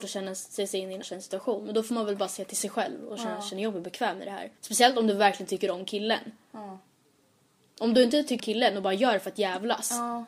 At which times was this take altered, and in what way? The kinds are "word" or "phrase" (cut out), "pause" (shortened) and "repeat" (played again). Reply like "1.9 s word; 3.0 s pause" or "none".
1.0 s word; 4.6 s pause; 8.4 s word